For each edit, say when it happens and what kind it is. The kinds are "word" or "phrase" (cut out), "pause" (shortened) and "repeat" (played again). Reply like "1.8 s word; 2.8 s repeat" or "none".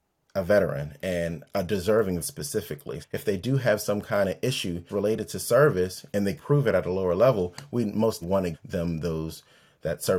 2.2 s word; 3.0 s word; 4.9 s word; 6.4 s word; 8.2 s word; 8.5 s word